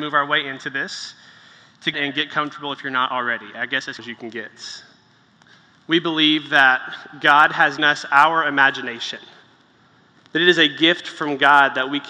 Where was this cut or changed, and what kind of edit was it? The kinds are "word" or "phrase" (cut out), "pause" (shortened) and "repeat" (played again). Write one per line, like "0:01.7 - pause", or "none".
0:01.9 - phrase
0:04.0 - word
0:05.4 - pause
0:07.8 - word